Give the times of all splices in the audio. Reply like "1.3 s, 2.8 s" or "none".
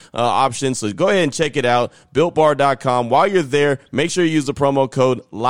none